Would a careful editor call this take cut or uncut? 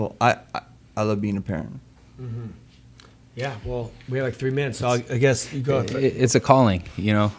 uncut